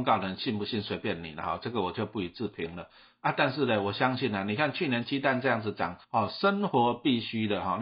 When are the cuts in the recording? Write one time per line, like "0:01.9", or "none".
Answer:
0:06.0